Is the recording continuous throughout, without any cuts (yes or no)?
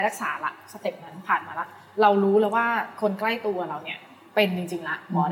yes